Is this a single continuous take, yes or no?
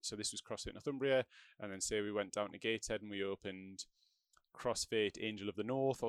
yes